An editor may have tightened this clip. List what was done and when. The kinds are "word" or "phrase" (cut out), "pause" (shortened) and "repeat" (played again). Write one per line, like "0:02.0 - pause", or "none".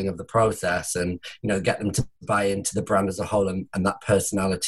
0:02.2 - pause